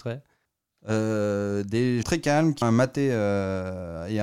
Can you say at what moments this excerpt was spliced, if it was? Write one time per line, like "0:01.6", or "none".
0:02.0
0:02.6